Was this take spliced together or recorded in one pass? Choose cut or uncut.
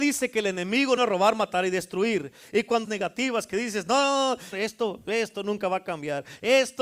cut